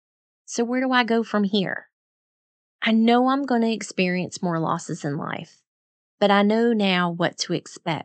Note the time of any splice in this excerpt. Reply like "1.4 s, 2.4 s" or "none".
none